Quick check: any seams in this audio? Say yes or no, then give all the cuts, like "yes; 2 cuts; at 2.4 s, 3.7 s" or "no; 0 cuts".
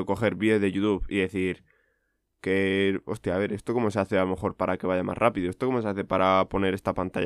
yes; 1 cut; at 1.1 s